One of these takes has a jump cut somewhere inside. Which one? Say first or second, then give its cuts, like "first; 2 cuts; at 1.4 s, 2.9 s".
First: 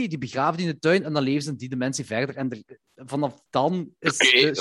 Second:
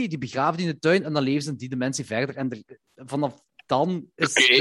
first; 1 cut; at 3.5 s